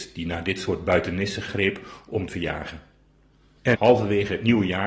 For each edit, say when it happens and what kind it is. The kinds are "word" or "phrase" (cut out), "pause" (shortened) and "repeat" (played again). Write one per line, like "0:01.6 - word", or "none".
0:01.5 - word
0:02.3 - phrase
0:03.7 - word